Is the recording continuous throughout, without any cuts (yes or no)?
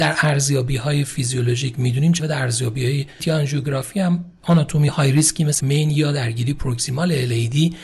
no